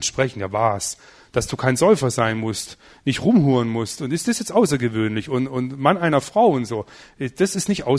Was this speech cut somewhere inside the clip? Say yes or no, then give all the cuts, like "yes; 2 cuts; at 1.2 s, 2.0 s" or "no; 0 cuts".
no; 0 cuts